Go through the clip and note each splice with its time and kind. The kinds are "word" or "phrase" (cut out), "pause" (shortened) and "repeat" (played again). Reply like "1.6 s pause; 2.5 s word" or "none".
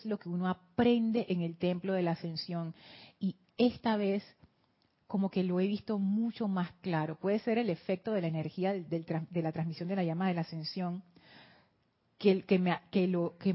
none